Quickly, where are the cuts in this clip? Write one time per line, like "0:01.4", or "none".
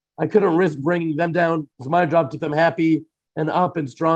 0:01.7
0:02.4